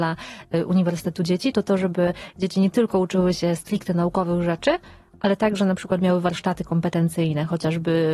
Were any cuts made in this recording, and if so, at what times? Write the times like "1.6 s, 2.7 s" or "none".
none